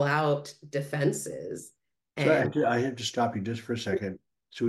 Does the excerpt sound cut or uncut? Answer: uncut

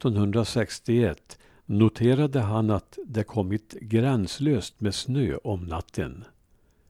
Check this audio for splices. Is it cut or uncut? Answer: uncut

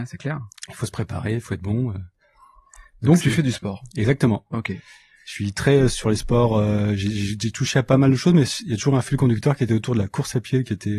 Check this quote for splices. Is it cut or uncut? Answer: uncut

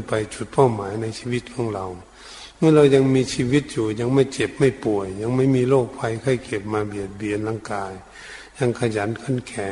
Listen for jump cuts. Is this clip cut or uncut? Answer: uncut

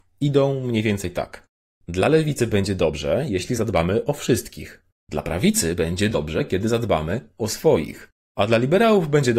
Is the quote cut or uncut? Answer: uncut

